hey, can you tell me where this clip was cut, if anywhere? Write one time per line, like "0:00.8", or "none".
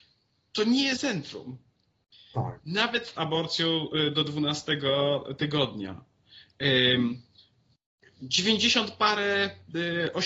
0:01.0
0:03.2